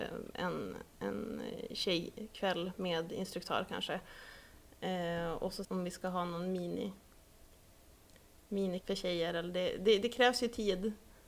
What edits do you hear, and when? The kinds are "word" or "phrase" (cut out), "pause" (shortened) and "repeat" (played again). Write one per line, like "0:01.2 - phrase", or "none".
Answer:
0:05.6 - phrase
0:08.8 - word

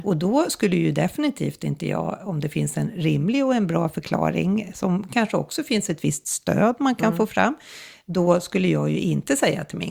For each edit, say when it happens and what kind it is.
none

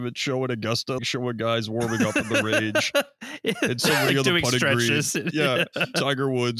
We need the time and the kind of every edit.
0:01.0 - word

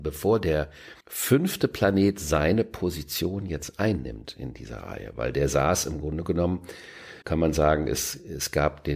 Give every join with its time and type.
0:01.0 - pause
0:07.2 - pause

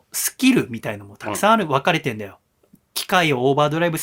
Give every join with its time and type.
none

